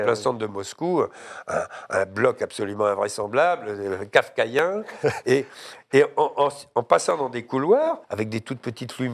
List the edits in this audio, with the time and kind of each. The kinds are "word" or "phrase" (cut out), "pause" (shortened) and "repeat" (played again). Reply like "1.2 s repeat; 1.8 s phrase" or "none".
8.0 s pause